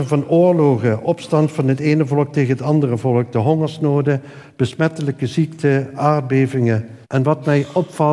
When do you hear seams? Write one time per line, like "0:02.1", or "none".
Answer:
0:07.0